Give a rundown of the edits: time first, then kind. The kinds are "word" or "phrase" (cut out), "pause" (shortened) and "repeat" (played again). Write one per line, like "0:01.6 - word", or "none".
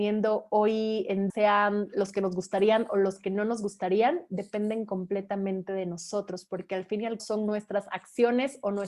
0:01.3 - word
0:07.2 - word